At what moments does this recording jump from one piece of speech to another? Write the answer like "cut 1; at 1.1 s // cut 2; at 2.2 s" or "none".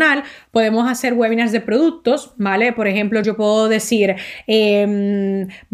none